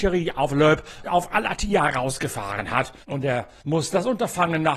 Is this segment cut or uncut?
cut